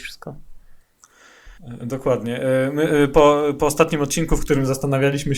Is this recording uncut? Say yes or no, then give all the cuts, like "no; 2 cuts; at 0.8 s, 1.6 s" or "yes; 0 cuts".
no; 1 cut; at 1.6 s